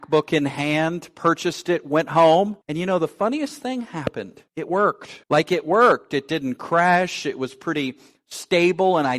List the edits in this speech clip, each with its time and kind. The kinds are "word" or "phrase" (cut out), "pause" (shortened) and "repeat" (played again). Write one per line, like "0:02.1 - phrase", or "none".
0:02.6 - pause
0:04.5 - pause
0:05.2 - pause